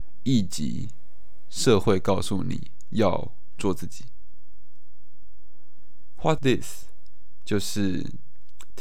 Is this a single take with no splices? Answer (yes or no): no